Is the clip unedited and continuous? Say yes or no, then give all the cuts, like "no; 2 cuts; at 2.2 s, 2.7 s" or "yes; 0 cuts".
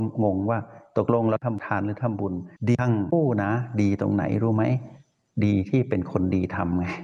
no; 1 cut; at 2.6 s